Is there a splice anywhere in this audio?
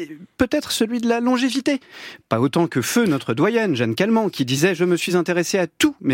no; 0 cuts

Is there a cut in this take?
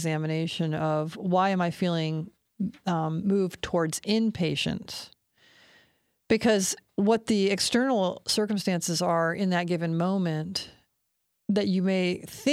no; 0 cuts

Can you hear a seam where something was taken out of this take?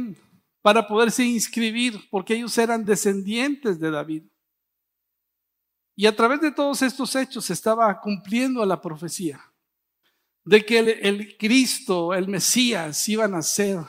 no; 0 cuts

